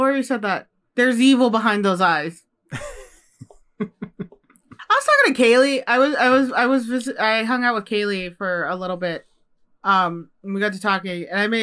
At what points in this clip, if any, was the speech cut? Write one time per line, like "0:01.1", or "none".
none